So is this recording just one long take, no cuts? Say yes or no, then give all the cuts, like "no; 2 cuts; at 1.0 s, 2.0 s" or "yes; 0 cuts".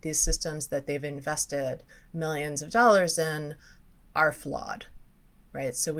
yes; 0 cuts